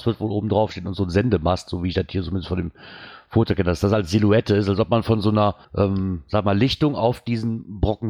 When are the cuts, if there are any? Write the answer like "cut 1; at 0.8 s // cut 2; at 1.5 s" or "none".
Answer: cut 1; at 5.6 s